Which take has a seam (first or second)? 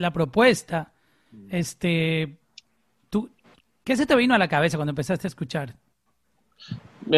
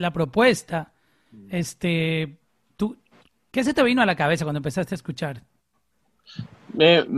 second